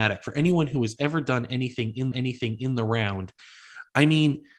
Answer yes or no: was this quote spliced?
yes